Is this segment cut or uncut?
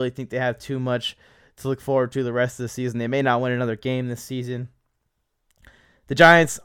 uncut